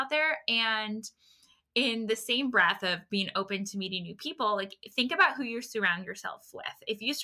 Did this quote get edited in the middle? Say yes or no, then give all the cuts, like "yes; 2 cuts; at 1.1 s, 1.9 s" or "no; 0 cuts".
no; 0 cuts